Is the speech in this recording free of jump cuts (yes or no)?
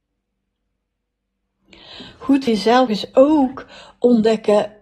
no